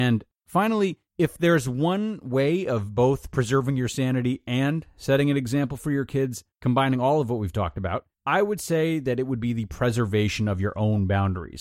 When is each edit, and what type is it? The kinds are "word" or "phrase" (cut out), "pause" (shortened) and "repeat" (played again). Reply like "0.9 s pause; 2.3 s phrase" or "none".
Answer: 1.1 s pause; 6.5 s pause; 8.1 s pause